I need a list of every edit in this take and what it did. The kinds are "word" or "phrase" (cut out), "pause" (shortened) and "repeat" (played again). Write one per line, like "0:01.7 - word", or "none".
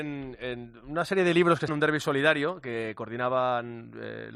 0:01.7 - word